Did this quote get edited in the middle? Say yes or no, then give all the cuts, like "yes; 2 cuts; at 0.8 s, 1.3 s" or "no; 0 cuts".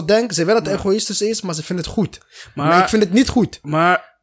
no; 0 cuts